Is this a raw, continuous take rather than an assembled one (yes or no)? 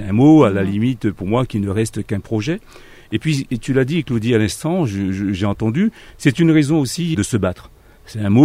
no